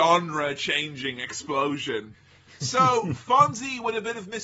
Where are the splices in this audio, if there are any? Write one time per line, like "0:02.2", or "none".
none